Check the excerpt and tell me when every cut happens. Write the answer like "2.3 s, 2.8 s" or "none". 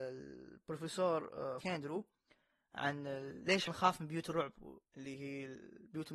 1.6 s, 3.7 s, 4.9 s